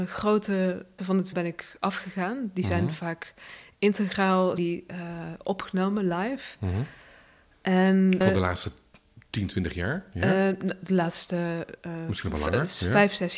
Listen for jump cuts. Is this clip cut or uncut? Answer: cut